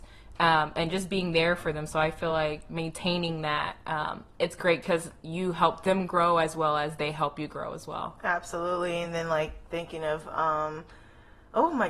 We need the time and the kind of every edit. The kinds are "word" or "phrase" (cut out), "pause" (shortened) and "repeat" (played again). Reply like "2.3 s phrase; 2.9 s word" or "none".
none